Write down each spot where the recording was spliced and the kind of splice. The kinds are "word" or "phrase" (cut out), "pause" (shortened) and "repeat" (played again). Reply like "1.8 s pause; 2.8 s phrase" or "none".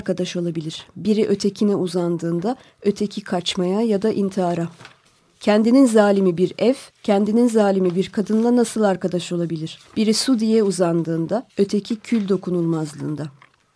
5.1 s pause; 6.9 s pause; 9.9 s pause; 11.5 s pause